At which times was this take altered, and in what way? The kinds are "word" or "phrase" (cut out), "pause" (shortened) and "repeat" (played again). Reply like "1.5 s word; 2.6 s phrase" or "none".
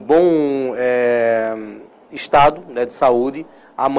none